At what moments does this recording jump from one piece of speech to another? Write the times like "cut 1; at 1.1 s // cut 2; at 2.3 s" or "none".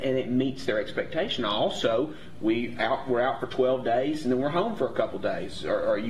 none